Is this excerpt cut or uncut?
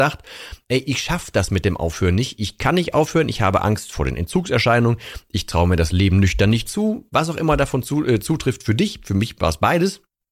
uncut